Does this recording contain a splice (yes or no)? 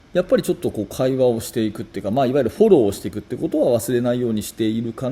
no